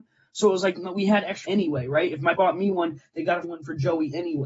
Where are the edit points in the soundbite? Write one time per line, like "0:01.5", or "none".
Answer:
0:01.4
0:02.4
0:03.4